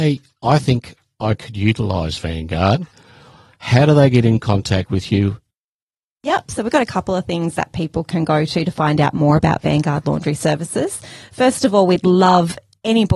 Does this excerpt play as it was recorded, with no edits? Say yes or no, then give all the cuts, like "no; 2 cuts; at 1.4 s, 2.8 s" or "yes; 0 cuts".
yes; 0 cuts